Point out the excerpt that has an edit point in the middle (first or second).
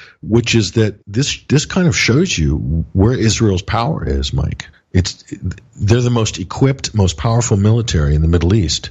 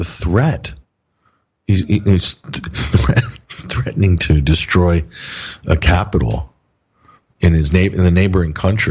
first